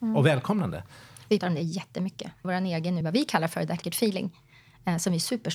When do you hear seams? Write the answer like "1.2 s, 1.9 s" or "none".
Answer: 1.4 s, 2.4 s, 3.0 s, 3.8 s